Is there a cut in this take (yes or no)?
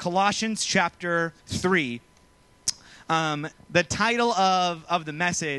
yes